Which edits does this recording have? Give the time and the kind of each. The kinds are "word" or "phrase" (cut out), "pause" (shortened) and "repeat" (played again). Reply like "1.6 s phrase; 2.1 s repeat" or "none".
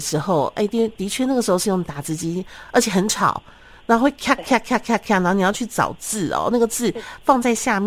none